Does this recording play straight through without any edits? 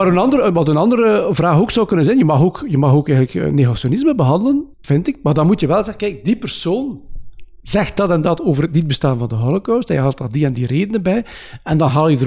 no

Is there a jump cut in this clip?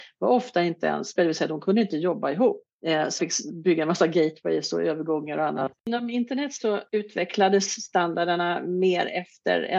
yes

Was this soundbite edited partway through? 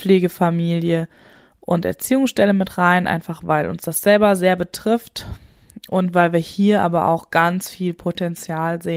no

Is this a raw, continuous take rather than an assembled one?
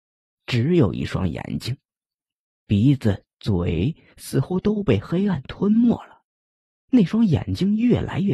yes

